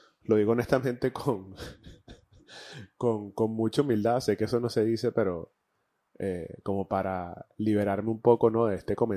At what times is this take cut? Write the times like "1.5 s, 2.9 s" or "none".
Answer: none